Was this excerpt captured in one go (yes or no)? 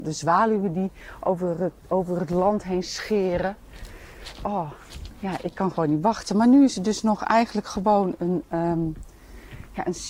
yes